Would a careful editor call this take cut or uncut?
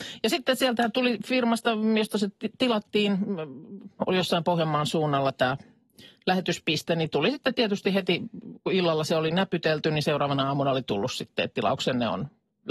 uncut